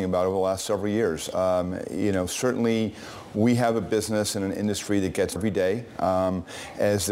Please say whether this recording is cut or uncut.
cut